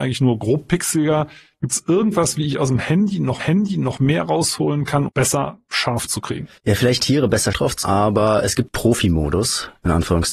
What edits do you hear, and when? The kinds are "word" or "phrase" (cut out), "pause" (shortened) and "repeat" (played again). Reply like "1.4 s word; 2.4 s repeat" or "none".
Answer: 3.4 s repeat; 5.1 s phrase; 6.1 s word; 6.6 s pause; 7.0 s phrase; 7.5 s word; 7.8 s word; 8.7 s word